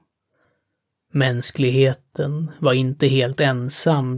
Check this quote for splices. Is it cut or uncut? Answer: uncut